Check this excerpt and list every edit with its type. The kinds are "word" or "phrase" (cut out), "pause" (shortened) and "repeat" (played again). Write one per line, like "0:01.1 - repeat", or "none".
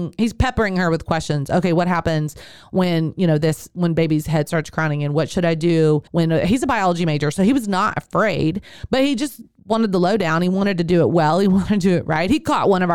0:06.1 - pause

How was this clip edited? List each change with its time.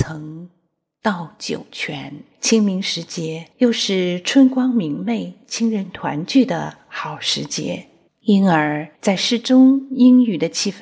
0:02.3 - pause
0:03.5 - pause
0:08.1 - pause
0:08.9 - pause

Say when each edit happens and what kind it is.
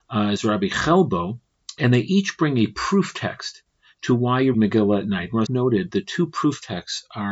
0:01.8 - word
0:04.5 - word
0:05.5 - word

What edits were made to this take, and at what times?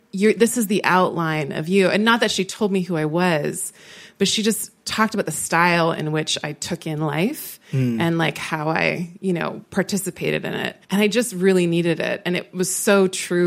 0:10.8 - pause

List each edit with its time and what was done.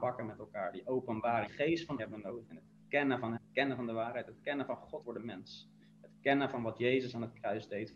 0:01.5 - word
0:02.0 - word
0:03.4 - word
0:05.0 - word

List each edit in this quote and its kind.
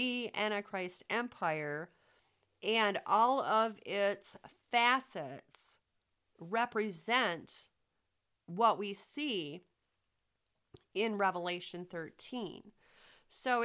none

